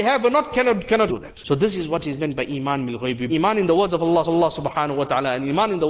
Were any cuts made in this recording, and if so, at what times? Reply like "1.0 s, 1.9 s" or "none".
1.1 s, 3.3 s, 4.2 s